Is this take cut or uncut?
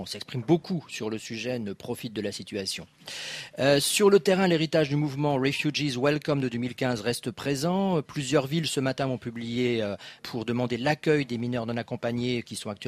cut